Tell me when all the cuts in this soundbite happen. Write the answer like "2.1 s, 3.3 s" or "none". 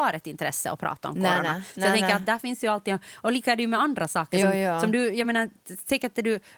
none

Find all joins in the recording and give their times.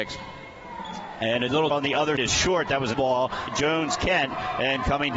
1.7 s, 2.2 s, 2.9 s, 3.5 s

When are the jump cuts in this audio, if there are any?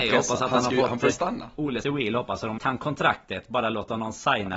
1.1 s, 1.8 s, 2.6 s

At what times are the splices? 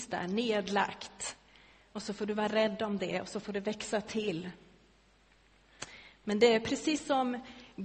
none

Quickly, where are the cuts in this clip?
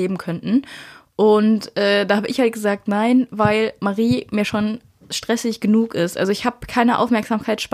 none

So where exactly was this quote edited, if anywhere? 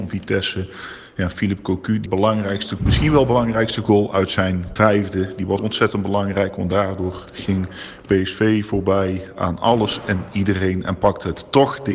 2.1 s, 2.8 s, 4.8 s, 5.6 s

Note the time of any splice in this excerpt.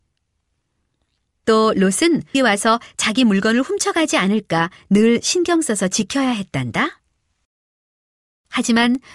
2.3 s

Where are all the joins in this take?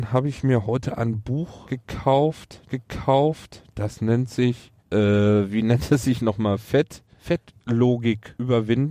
2.7 s, 4.8 s

